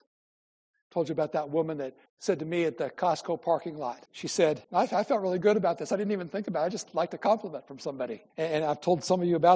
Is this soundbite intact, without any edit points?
no; 4 cuts; at 2.1 s, 4.1 s, 4.6 s, 8.3 s

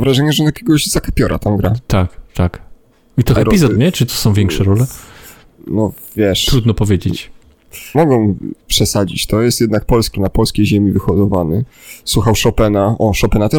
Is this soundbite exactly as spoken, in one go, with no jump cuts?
no; 5 cuts; at 3.4 s, 3.8 s, 4.1 s, 7.9 s, 10.1 s

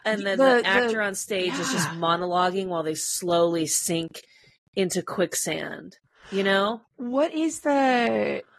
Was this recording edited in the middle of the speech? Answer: no; 0 cuts

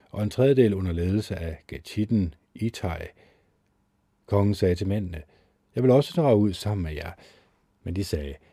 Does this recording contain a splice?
no; 0 cuts

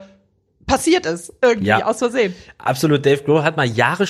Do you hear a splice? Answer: no; 0 cuts

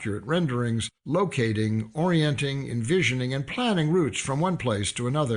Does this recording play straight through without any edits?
no; 1 cut; at 1.0 s

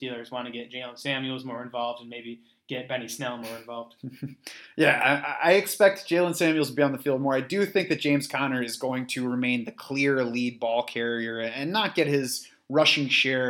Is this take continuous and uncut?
yes; 0 cuts

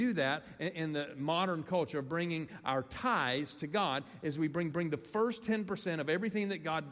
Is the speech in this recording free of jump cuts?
no; 1 cut; at 4.7 s

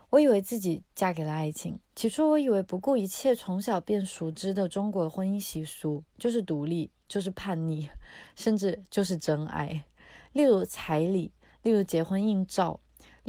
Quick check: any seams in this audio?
yes; 1 cut; at 1.9 s

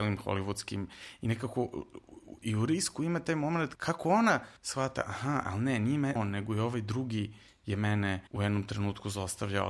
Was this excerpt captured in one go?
no; 4 cuts; at 3.8 s, 4.6 s, 6.2 s, 8.3 s

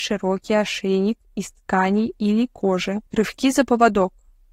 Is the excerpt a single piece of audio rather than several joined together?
no; 1 cut; at 3.1 s

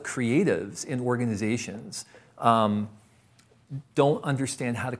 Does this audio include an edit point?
no; 0 cuts

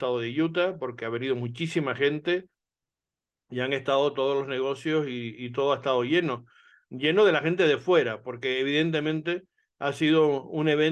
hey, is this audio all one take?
yes; 0 cuts

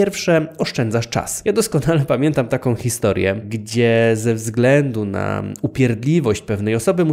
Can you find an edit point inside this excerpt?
no; 0 cuts

